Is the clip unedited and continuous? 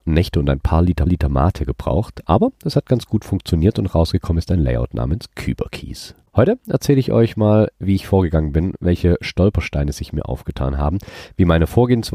no; 2 cuts; at 1.1 s, 6.3 s

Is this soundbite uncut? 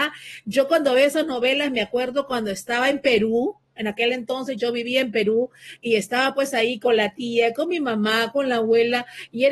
yes; 0 cuts

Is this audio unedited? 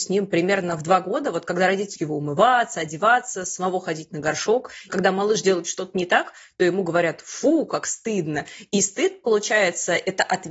no; 2 cuts; at 2.0 s, 4.9 s

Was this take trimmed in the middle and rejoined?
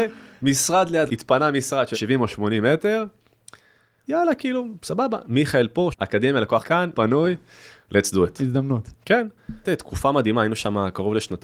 yes; 7 cuts; at 1.1 s, 1.9 s, 4.1 s, 5.9 s, 6.6 s, 6.9 s, 9.6 s

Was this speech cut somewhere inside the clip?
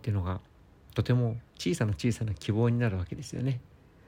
yes; 1 cut; at 1.5 s

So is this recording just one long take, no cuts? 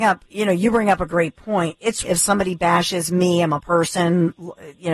no; 2 cuts; at 2.0 s, 3.6 s

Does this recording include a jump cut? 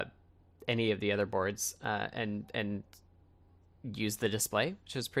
no; 0 cuts

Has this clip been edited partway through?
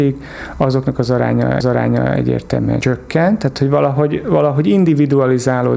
yes; 1 cut; at 1.6 s

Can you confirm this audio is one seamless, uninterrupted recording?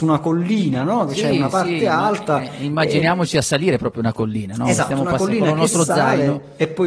yes; 0 cuts

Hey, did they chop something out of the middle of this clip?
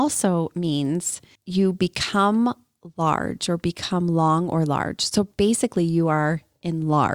no; 0 cuts

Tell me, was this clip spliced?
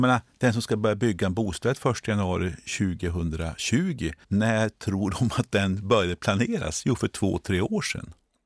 yes; 1 cut; at 4.2 s

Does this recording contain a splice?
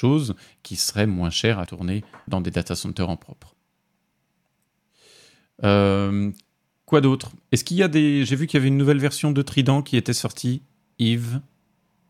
yes; 2 cuts; at 1.7 s, 2.3 s

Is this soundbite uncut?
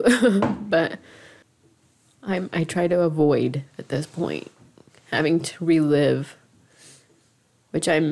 yes; 0 cuts

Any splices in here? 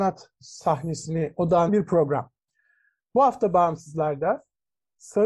yes; 1 cut; at 1.7 s

